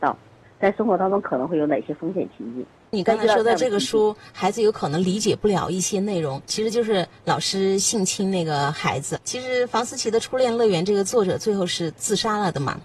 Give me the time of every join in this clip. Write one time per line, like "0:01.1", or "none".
0:06.5